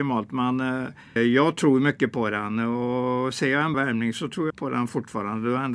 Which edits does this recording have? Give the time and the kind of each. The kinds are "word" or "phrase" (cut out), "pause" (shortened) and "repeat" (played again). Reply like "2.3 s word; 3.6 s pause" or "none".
1.2 s word; 3.7 s word; 4.5 s word